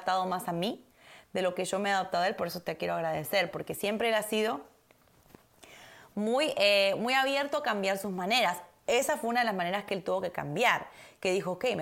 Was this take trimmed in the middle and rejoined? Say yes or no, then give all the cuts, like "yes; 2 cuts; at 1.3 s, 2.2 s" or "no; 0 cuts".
no; 0 cuts